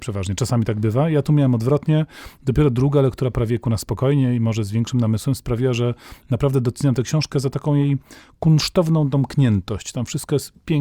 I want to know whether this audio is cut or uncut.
uncut